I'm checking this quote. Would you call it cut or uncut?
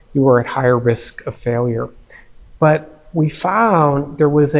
uncut